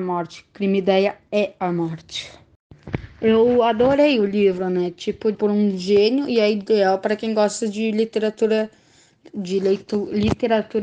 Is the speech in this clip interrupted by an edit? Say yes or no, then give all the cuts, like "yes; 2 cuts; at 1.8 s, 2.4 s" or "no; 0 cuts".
yes; 1 cut; at 5.3 s